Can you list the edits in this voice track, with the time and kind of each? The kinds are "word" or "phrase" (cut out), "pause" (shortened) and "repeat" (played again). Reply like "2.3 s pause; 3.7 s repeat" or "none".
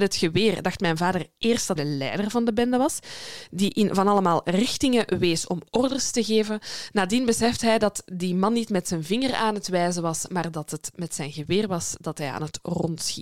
1.8 s word